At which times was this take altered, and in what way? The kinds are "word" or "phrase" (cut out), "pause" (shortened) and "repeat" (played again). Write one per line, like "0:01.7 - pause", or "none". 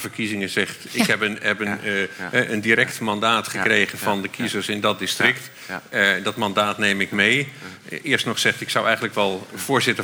none